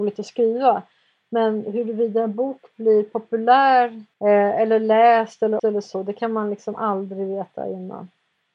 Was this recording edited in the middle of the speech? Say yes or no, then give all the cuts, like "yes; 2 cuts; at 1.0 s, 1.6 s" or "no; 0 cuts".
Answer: yes; 2 cuts; at 4.1 s, 5.6 s